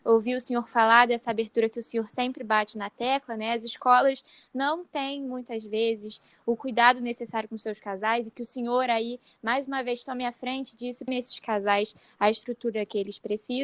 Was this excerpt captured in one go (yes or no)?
no